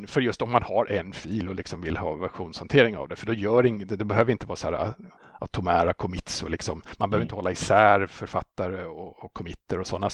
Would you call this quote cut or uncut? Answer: uncut